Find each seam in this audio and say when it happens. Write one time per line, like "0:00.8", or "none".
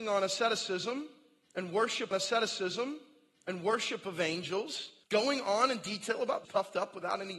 0:02.1
0:05.0
0:06.4